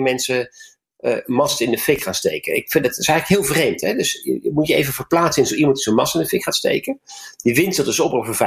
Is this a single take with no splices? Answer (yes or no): yes